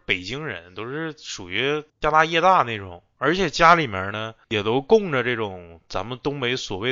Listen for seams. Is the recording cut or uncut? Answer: cut